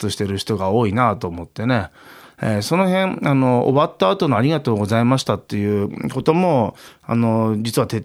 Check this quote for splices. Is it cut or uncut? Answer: uncut